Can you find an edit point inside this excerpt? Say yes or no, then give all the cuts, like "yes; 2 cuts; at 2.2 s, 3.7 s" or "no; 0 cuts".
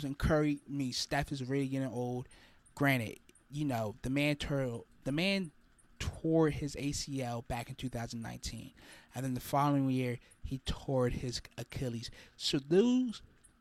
no; 0 cuts